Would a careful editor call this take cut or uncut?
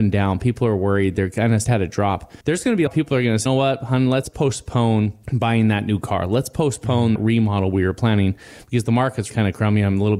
cut